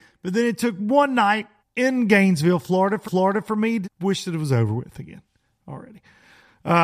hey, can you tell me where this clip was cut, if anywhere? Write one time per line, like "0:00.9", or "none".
0:01.6
0:03.0
0:03.8